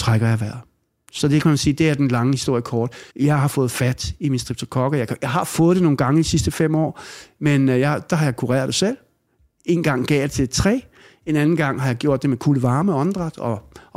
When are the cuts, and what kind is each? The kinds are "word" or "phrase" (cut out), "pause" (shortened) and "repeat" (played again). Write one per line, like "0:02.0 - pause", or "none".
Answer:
0:03.1 - pause